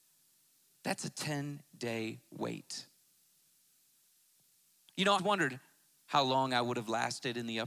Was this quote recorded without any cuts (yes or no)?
no